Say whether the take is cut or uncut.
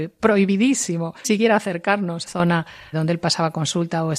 cut